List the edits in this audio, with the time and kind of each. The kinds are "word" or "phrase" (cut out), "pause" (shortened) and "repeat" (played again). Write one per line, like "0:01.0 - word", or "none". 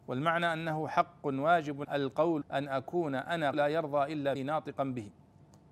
0:01.8 - word
0:02.4 - word
0:03.5 - word
0:04.4 - word